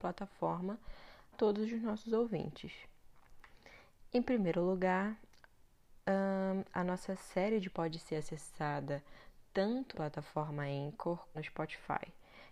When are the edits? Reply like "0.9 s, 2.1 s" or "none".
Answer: 1.3 s, 7.7 s, 9.9 s, 11.3 s